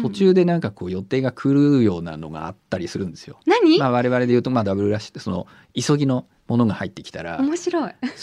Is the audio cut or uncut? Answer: uncut